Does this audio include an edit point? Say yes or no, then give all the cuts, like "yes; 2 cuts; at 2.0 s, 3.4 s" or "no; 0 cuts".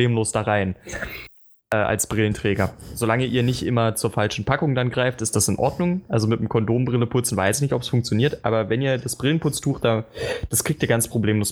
no; 0 cuts